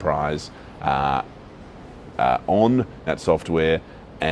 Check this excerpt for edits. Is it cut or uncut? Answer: cut